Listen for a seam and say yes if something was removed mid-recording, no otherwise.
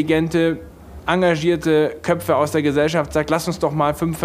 no